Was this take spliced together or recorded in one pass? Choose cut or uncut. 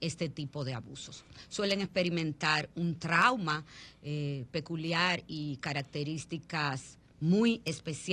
uncut